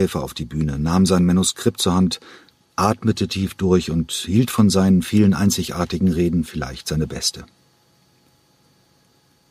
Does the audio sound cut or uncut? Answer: uncut